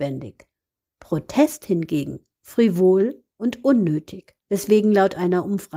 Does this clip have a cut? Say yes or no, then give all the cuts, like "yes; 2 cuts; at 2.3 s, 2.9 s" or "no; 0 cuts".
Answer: yes; 2 cuts; at 3.3 s, 4.4 s